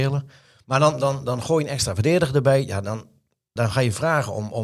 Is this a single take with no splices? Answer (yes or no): no